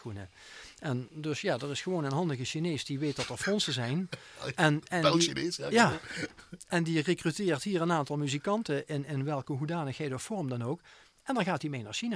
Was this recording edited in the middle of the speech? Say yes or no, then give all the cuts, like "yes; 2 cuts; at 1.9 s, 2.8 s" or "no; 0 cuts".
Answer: no; 0 cuts